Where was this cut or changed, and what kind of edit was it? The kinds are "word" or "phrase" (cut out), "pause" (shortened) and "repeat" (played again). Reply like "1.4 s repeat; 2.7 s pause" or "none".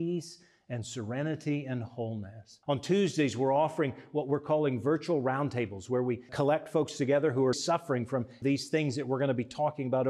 2.6 s pause; 6.3 s word; 7.5 s word; 8.4 s phrase

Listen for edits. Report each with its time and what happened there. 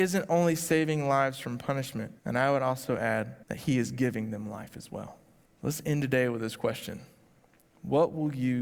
2.2 s pause; 3.4 s pause; 5.5 s pause

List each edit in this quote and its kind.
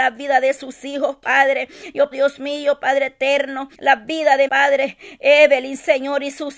2.1 s word; 3.7 s pause; 4.5 s phrase

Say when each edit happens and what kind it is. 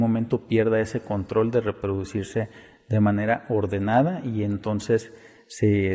none

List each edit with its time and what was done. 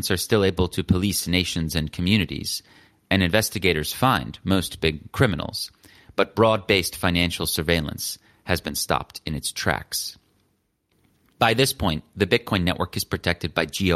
none

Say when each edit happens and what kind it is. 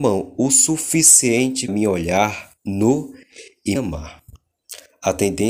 1.7 s word; 2.6 s pause; 3.7 s word

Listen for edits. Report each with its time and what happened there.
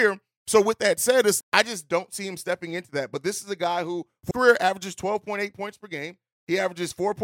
1.4 s word; 4.3 s word

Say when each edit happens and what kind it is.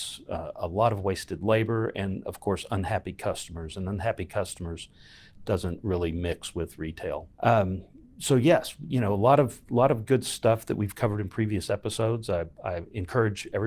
7.3 s pause

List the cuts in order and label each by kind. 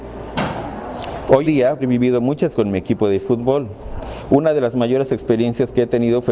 1.4 s word; 1.8 s phrase; 2.5 s word

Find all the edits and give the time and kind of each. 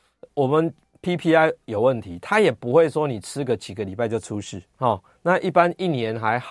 4.7 s pause

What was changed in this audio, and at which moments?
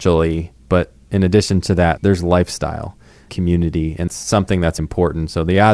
2.0 s word; 3.3 s word; 4.1 s word; 4.8 s word

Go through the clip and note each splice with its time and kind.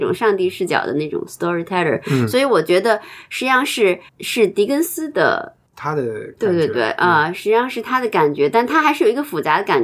4.1 s pause

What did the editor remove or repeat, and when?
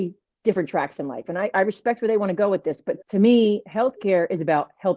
3.0 s pause

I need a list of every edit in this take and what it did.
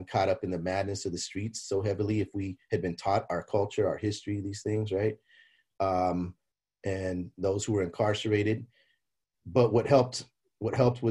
none

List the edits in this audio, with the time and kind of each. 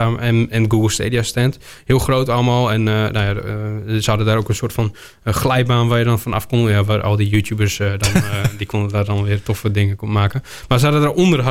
none

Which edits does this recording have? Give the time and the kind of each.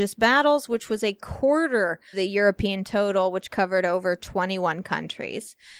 2.1 s word

